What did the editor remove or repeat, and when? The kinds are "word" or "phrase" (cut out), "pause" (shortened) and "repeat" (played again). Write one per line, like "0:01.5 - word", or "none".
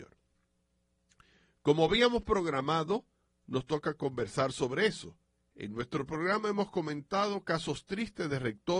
none